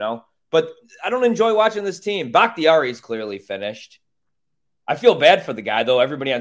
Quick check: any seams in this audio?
no; 0 cuts

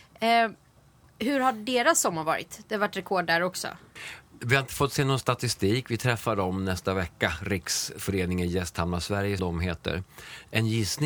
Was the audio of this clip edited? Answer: yes; 1 cut; at 9.4 s

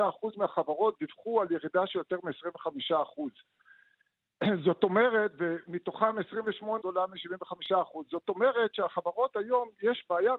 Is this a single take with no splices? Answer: no; 1 cut; at 6.8 s

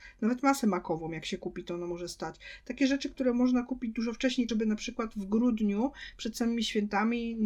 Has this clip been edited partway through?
yes; 1 cut; at 4.5 s

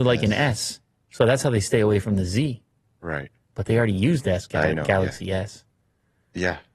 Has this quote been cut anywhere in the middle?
no; 0 cuts

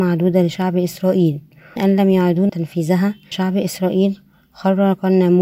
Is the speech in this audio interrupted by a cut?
yes; 3 cuts; at 1.8 s, 2.5 s, 3.3 s

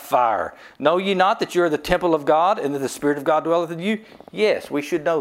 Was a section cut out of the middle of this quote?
no; 0 cuts

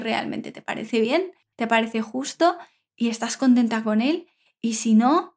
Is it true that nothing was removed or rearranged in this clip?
yes; 0 cuts

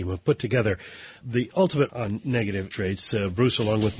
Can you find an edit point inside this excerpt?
yes; 3 cuts; at 1.2 s, 1.9 s, 2.7 s

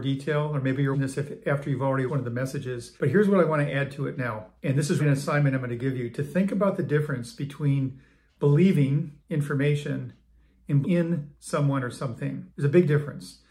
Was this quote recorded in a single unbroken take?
no; 8 cuts; at 0.9 s, 2.1 s, 3.0 s, 4.6 s, 5.0 s, 9.2 s, 10.8 s, 12.5 s

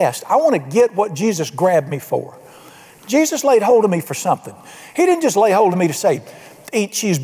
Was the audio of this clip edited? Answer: no; 0 cuts

